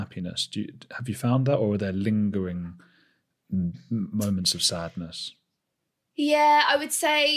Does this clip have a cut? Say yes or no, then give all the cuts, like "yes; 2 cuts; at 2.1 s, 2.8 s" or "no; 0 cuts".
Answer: no; 0 cuts